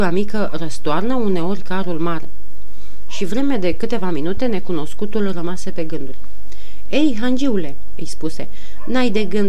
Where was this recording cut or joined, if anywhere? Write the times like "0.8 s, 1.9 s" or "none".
none